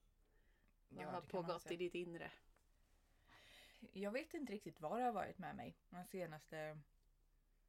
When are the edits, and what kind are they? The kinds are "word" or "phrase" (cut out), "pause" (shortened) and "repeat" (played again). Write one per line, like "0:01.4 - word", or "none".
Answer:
0:05.8 - pause